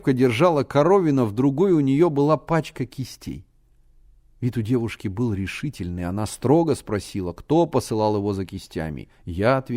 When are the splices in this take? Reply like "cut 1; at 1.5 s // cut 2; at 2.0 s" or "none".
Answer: cut 1; at 4.0 s